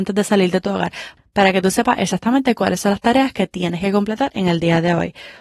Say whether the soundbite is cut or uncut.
uncut